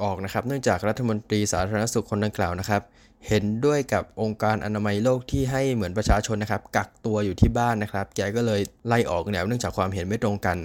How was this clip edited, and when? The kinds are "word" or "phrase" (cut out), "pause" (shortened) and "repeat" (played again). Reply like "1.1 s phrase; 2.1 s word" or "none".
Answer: none

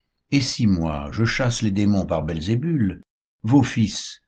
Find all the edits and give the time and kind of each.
none

